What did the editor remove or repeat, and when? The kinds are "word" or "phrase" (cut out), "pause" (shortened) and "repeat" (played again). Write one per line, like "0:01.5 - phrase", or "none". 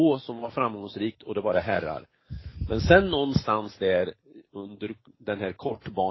none